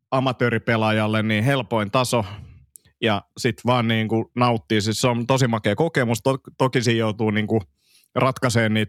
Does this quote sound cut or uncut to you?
uncut